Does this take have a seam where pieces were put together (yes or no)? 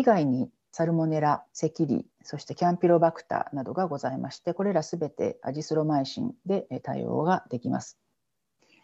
yes